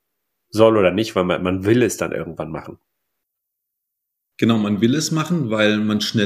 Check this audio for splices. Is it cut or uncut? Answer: uncut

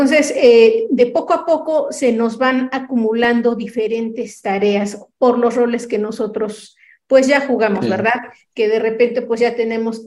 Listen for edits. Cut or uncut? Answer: uncut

